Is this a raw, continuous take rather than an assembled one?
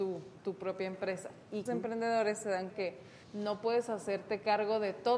no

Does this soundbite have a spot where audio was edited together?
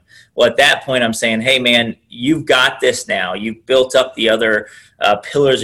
no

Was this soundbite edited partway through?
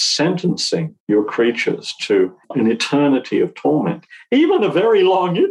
yes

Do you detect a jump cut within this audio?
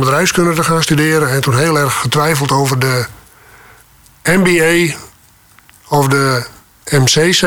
no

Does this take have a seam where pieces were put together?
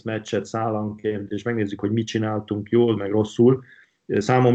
no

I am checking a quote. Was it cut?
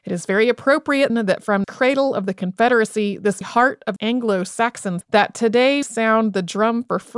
yes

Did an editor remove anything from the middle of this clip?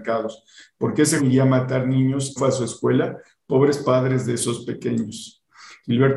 yes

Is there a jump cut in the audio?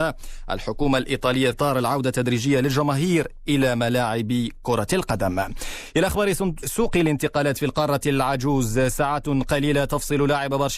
yes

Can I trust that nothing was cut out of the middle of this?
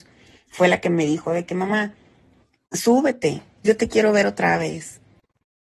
yes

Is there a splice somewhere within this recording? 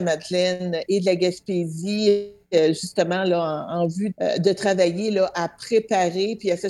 yes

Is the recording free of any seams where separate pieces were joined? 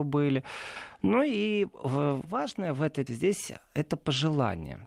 no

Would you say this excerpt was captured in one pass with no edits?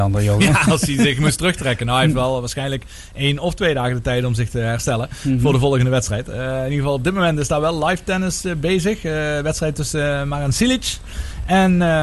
yes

